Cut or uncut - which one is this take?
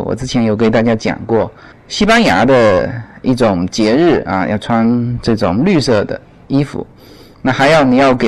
uncut